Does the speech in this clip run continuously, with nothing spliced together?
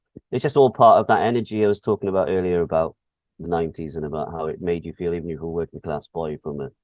no; 1 cut; at 3.4 s

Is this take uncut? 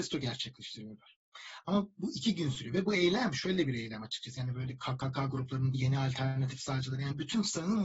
no; 1 cut; at 5.7 s

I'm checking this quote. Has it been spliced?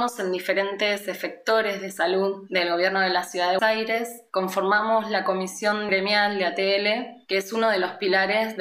yes; 2 cuts; at 3.6 s, 5.9 s

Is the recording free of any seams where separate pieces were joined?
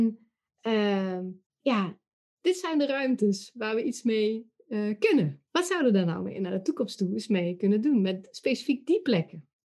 no; 2 cuts; at 1.5 s, 5.5 s

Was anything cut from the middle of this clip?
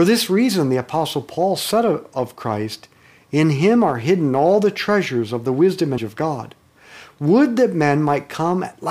yes; 1 cut; at 6.0 s

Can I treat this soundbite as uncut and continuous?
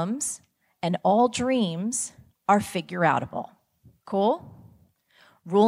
yes; 0 cuts

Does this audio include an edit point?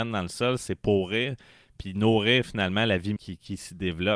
yes; 1 cut; at 3.2 s

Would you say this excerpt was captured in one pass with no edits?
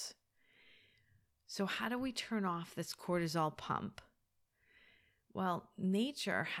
yes; 0 cuts

